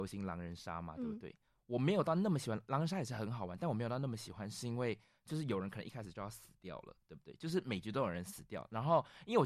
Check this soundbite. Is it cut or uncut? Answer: uncut